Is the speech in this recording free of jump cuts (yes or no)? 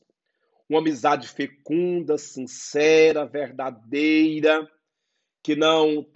yes